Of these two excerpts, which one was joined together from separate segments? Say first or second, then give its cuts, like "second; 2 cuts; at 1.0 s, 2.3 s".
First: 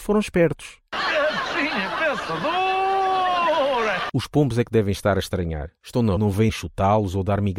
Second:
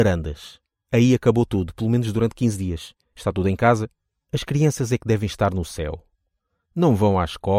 first; 2 cuts; at 6.2 s, 6.5 s